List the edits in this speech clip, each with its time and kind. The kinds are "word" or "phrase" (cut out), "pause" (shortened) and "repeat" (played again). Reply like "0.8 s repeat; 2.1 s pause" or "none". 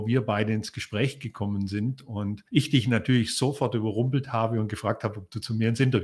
2.5 s pause